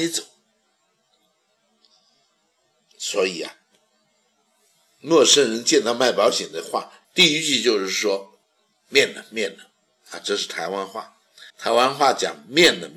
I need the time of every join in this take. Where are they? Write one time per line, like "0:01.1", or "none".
0:07.0
0:08.4
0:11.5